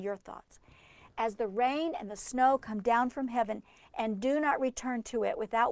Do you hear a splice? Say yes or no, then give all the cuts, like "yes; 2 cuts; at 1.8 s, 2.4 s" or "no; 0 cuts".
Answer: no; 0 cuts